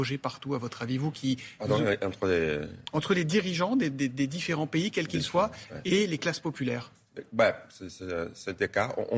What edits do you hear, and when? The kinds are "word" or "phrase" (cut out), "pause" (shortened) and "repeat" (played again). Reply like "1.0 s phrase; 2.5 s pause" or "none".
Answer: none